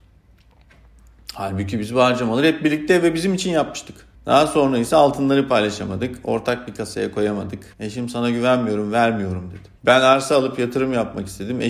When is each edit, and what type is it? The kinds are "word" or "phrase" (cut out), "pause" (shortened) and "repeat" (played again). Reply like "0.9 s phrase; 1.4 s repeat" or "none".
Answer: 4.1 s pause; 7.7 s pause; 9.8 s pause